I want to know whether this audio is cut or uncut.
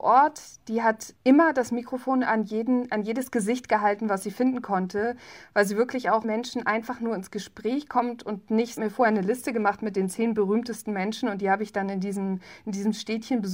cut